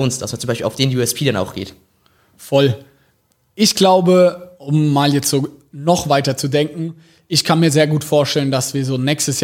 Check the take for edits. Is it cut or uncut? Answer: uncut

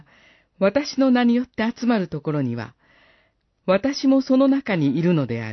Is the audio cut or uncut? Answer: uncut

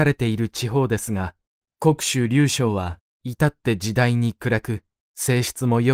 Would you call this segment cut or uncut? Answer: uncut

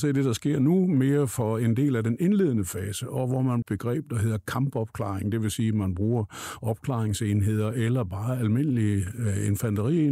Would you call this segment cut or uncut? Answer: cut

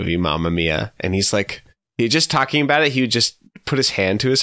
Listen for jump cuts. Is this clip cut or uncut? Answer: uncut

